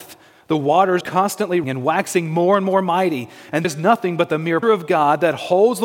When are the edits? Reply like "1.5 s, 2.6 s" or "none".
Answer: 1.0 s, 1.6 s, 3.6 s, 4.6 s